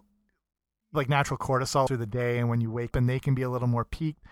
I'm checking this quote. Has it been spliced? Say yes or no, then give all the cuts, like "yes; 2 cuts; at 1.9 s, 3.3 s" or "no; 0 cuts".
yes; 3 cuts; at 0.9 s, 1.9 s, 2.9 s